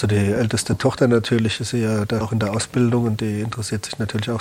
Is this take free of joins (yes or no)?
no